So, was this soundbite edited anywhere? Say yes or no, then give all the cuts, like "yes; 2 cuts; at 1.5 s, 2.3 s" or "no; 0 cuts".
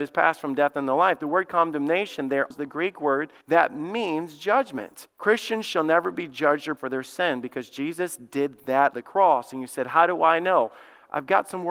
yes; 5 cuts; at 2.5 s, 3.4 s, 5.1 s, 6.8 s, 8.9 s